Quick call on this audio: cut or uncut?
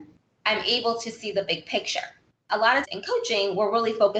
cut